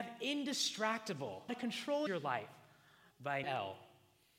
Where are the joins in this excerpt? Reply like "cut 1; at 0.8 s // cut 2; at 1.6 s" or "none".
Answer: cut 1; at 1.5 s // cut 2; at 2.1 s // cut 3; at 3.4 s